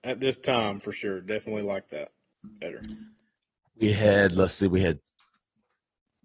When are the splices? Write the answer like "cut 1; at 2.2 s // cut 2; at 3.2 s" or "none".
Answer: none